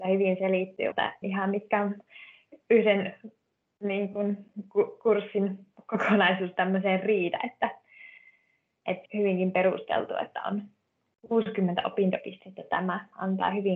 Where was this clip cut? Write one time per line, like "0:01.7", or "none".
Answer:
0:00.9
0:01.2
0:09.1